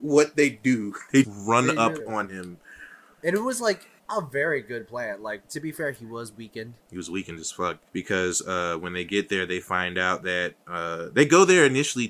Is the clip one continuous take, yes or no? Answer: no